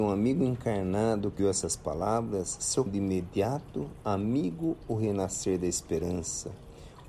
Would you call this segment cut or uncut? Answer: cut